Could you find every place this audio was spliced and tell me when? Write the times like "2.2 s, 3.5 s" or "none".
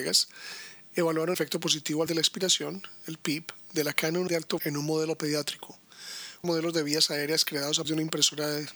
1.3 s, 2.1 s, 4.3 s, 4.6 s, 6.4 s, 7.8 s